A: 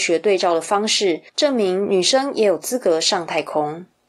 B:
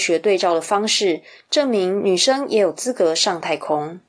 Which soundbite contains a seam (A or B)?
A